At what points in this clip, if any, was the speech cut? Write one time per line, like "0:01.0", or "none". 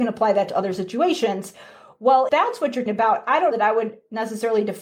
0:02.3
0:02.9
0:03.5

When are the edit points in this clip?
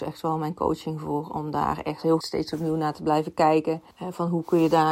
0:02.2
0:03.9

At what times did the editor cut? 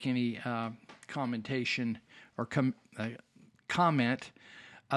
none

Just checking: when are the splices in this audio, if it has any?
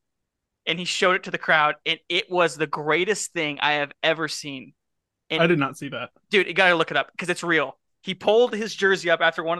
none

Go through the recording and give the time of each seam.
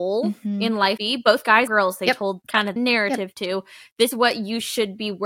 0:01.0
0:01.7
0:02.8
0:04.1

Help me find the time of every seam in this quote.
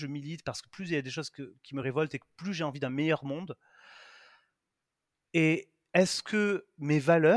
none

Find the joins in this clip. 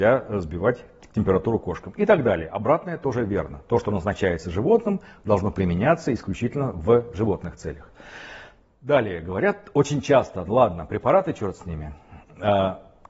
none

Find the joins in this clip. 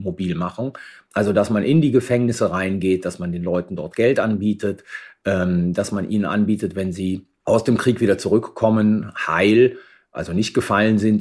none

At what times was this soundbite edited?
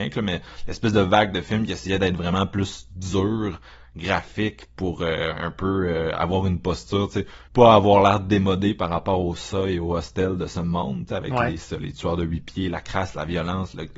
0:07.5

